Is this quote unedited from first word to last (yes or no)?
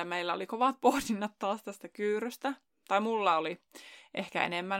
yes